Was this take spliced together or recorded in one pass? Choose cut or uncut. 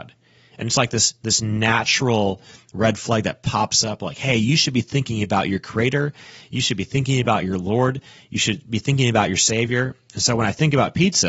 uncut